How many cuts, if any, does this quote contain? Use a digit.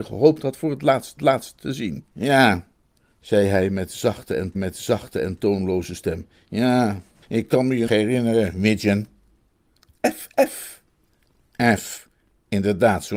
5